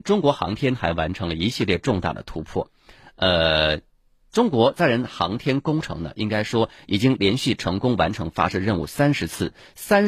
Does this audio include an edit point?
no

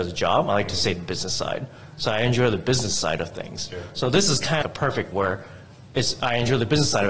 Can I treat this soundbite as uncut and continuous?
no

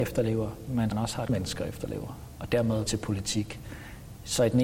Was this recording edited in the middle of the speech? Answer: yes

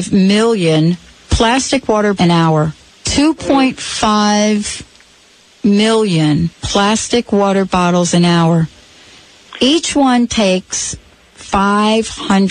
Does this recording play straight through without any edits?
no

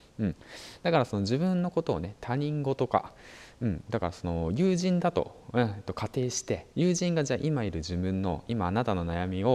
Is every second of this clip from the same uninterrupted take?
no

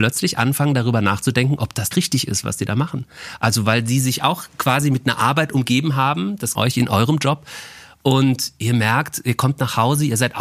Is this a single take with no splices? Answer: no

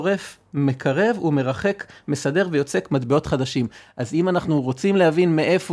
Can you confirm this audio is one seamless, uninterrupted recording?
yes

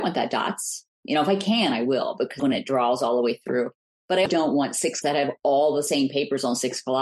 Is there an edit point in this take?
yes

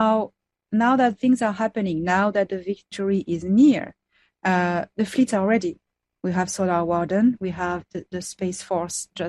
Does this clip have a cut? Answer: no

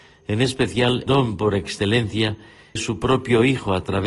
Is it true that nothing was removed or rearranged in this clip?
no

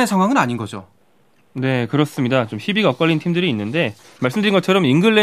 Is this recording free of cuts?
yes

